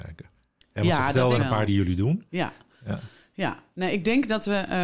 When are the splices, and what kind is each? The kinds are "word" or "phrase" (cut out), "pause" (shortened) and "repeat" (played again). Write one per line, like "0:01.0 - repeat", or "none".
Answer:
0:01.4 - word
0:01.7 - word